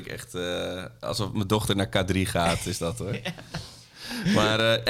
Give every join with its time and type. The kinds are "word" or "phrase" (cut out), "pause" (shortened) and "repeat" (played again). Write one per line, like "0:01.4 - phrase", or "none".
none